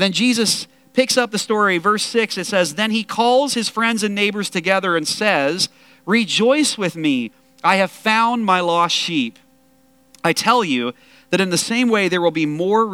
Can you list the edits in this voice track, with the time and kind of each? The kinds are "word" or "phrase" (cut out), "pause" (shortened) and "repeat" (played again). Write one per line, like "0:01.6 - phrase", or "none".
none

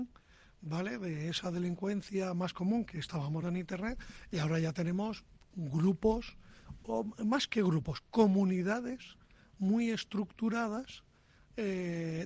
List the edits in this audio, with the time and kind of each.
0:03.4 - word

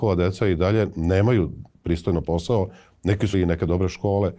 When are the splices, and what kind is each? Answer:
0:02.2 - word
0:03.3 - word

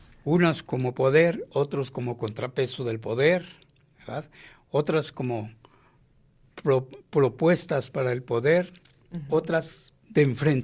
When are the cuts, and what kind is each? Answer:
none

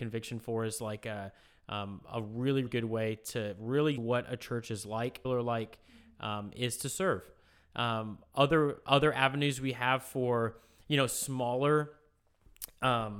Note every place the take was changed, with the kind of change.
0:02.7 - word
0:04.0 - word
0:05.2 - phrase

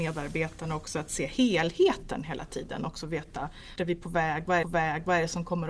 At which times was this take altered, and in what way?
0:03.8 - word
0:04.6 - repeat

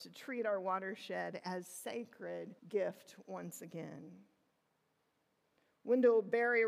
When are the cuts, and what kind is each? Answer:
0:02.6 - pause

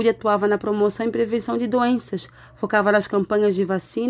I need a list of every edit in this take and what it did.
none

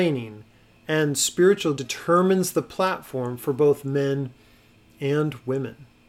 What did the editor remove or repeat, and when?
0:01.8 - word

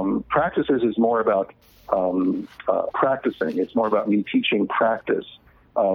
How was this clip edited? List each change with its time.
none

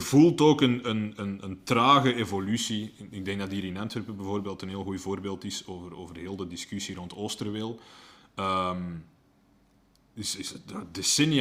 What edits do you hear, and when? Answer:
none

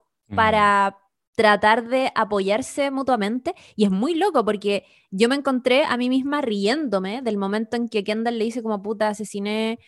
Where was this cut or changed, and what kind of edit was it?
none

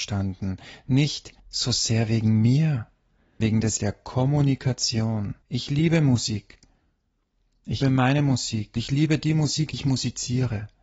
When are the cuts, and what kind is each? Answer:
0:01.4 - pause
0:03.4 - word
0:03.8 - word
0:05.4 - pause
0:07.8 - word
0:08.8 - word
0:09.7 - word

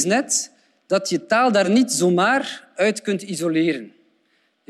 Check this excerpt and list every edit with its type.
none

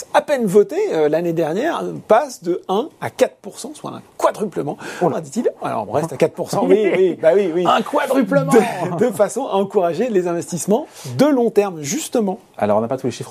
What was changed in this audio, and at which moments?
0:05.1 - phrase
0:05.9 - word

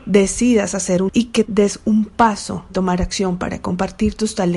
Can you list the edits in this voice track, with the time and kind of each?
0:01.1 - word
0:01.5 - word
0:02.7 - word

